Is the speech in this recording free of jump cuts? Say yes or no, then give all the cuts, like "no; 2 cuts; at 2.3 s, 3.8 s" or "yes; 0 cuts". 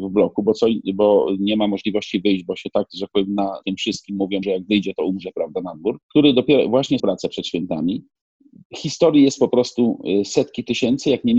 no; 5 cuts; at 3.6 s, 4.4 s, 6.0 s, 7.0 s, 8.2 s